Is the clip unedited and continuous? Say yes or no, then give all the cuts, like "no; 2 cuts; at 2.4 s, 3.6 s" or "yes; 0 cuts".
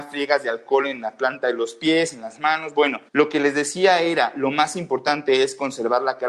no; 1 cut; at 3.1 s